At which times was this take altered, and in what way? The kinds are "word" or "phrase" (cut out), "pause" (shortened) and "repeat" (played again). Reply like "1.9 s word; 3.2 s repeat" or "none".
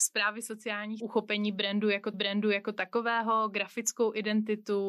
1.0 s phrase; 2.1 s repeat